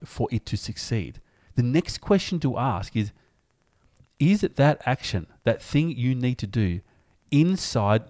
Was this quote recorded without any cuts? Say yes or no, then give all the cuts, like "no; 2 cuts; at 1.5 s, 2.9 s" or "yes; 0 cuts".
yes; 0 cuts